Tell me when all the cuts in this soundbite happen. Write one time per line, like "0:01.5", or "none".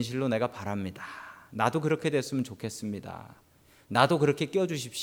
none